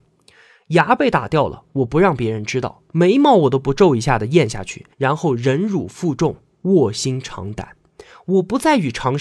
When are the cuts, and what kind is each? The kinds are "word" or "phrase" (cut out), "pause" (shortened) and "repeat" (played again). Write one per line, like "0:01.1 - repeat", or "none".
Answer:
0:04.9 - pause